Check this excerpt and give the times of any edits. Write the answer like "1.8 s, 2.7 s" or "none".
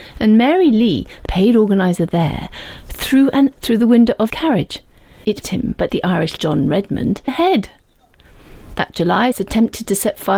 1.3 s, 3.6 s, 4.3 s, 5.4 s, 5.9 s, 6.4 s, 7.3 s, 9.3 s